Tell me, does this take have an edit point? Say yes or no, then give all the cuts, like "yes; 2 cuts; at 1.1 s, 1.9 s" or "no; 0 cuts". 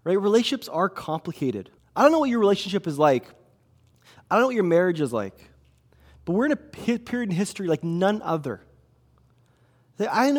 yes; 1 cut; at 1.8 s